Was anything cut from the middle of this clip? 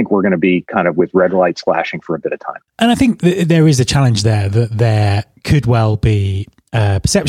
no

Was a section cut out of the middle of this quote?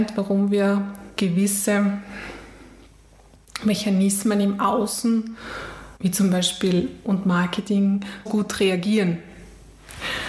yes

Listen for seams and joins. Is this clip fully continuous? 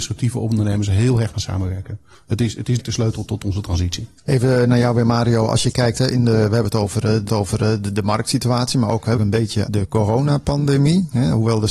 no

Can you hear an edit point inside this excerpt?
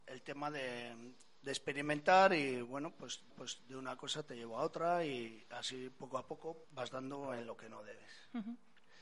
yes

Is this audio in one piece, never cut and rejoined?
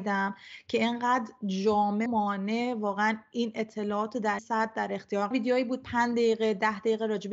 no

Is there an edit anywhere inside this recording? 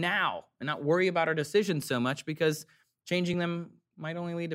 no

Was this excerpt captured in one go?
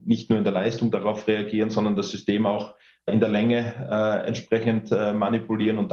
yes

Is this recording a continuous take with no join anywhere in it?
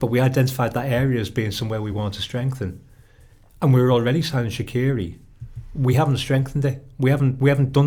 yes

